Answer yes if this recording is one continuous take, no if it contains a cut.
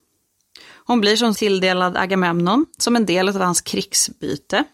no